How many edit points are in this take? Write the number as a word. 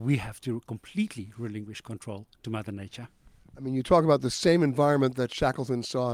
zero